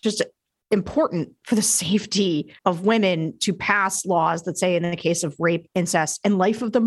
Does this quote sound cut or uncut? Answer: cut